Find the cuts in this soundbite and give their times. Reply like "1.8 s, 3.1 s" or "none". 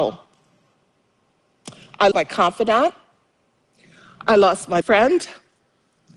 2.1 s, 4.8 s